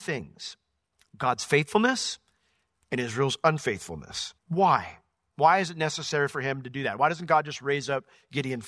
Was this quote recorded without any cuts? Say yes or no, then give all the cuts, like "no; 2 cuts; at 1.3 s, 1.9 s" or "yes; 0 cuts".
no; 1 cut; at 4.4 s